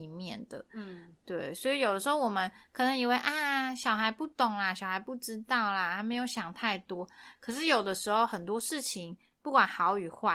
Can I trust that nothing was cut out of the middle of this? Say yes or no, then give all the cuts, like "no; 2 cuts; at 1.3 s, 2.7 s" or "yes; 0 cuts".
yes; 0 cuts